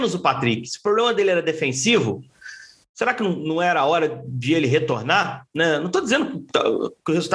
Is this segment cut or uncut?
uncut